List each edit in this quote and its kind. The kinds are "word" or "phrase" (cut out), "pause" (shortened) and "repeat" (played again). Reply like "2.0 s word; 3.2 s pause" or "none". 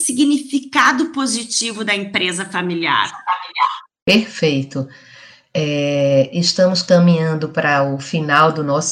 none